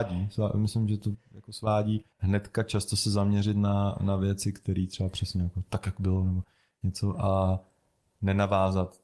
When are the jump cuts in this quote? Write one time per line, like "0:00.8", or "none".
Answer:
0:02.1